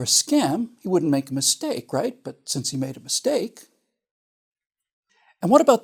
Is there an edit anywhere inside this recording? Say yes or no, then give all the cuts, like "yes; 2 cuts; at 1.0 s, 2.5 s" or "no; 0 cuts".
no; 0 cuts